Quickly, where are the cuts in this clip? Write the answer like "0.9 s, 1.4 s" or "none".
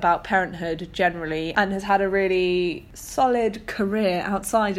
none